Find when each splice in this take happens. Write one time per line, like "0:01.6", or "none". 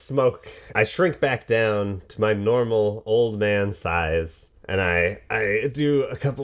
0:04.6